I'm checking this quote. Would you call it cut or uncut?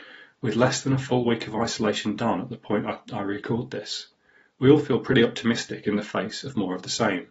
uncut